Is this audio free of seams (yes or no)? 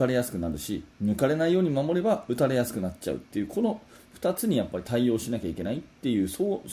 no